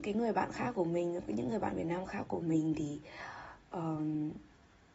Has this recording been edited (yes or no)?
no